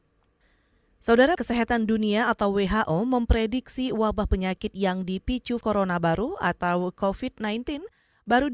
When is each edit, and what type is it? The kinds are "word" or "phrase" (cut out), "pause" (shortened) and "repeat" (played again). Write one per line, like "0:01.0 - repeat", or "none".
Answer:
0:01.4 - word
0:05.6 - word